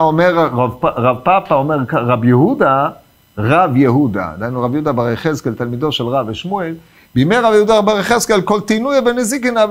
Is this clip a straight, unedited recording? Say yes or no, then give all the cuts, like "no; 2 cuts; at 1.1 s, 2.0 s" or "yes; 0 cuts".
yes; 0 cuts